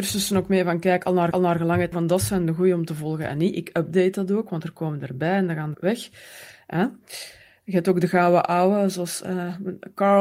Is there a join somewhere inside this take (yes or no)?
yes